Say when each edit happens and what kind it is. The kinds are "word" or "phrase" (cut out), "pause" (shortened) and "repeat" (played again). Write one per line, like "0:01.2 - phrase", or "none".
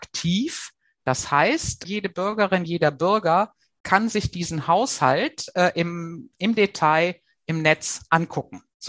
none